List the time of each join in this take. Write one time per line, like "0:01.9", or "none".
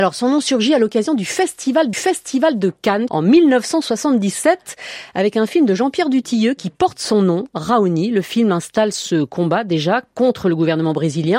0:01.9
0:03.1